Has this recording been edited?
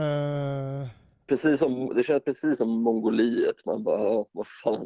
no; 0 cuts

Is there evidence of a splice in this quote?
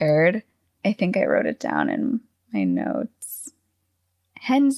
no; 0 cuts

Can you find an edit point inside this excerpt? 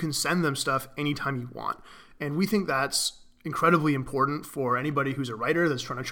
no; 0 cuts

